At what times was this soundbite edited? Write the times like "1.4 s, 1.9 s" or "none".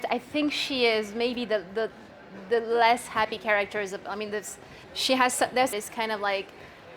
4.8 s, 5.7 s